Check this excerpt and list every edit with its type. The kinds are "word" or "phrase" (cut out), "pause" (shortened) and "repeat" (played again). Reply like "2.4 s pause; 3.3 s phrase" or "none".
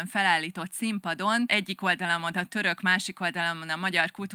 none